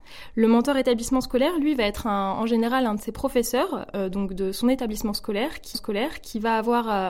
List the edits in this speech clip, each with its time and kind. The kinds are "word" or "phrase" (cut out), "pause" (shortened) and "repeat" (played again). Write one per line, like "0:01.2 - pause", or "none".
0:05.7 - repeat